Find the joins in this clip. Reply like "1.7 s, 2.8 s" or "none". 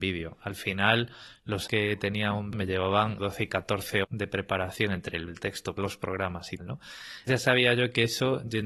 1.7 s, 2.5 s, 3.2 s, 4.0 s, 5.3 s, 5.8 s, 6.6 s, 7.3 s